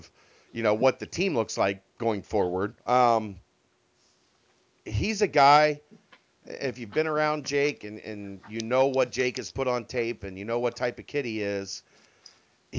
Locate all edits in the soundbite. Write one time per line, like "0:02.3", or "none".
0:02.8